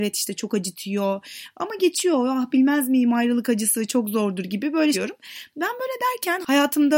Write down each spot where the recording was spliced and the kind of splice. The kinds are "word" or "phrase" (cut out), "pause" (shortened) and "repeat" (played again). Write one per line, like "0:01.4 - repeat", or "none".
0:04.9 - word